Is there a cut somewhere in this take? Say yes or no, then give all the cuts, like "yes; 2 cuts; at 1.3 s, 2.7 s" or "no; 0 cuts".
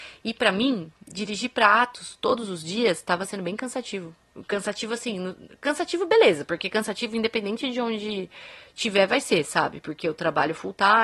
no; 0 cuts